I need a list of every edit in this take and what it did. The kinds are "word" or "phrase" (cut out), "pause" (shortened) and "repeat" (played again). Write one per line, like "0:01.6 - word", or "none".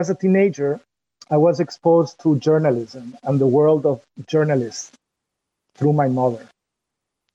none